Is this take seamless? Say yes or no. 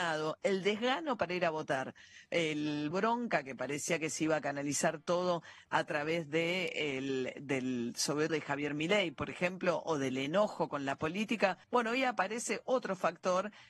no